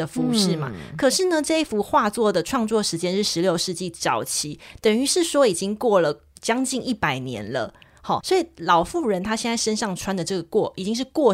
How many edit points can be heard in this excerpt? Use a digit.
1